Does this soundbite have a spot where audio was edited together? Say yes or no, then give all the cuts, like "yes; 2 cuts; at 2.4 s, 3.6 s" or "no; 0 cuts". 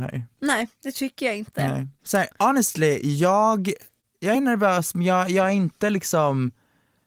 no; 0 cuts